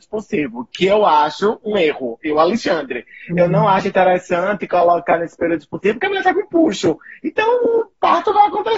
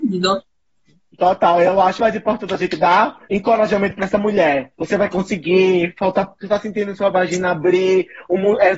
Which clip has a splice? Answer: second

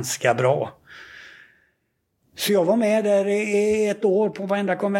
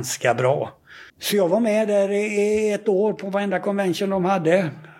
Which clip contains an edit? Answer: second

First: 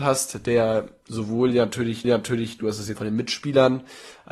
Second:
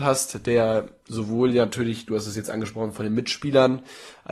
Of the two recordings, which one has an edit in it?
first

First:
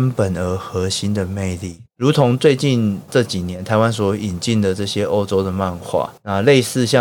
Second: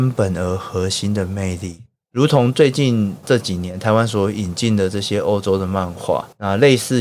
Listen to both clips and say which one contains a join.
first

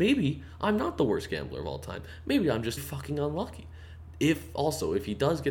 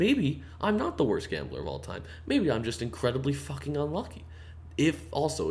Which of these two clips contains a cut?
first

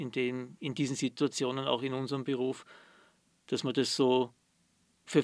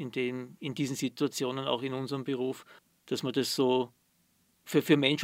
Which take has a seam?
second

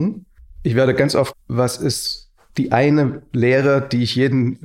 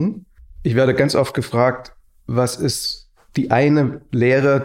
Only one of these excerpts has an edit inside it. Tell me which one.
first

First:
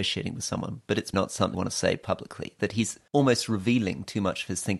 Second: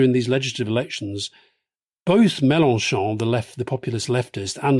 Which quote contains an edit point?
first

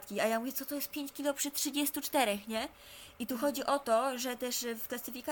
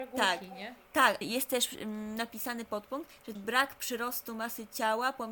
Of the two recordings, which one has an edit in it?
second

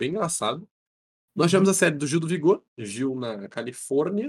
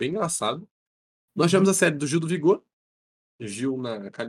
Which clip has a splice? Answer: first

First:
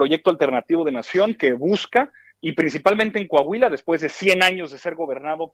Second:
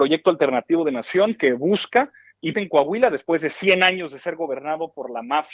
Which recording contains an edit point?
second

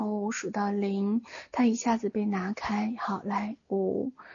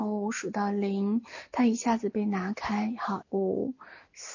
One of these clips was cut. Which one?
second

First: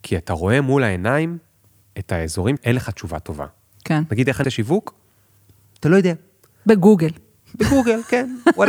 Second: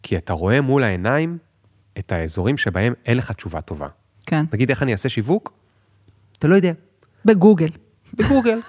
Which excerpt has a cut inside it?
first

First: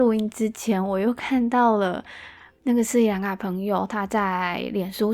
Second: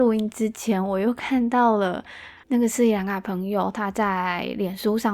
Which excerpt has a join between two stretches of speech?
second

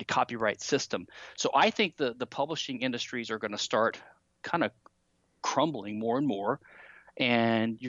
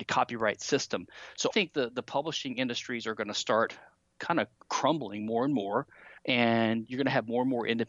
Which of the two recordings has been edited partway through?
second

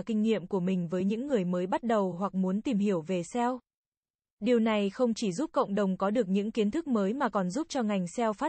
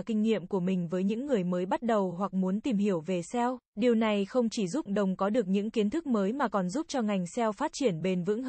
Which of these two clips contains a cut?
second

